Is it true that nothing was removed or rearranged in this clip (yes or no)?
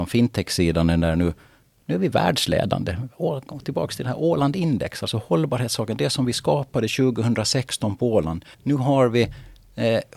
no